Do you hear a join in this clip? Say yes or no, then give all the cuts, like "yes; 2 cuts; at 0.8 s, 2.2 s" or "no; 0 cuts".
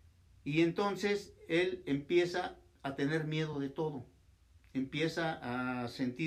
no; 0 cuts